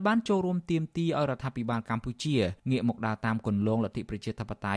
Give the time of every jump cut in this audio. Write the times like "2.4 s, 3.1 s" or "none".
2.6 s